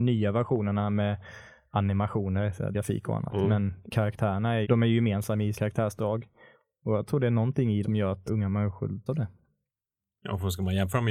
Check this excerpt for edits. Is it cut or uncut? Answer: cut